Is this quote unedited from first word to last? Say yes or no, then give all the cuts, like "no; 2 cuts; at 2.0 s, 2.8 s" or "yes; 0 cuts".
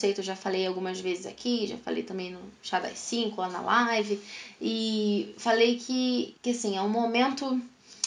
no; 1 cut; at 6.4 s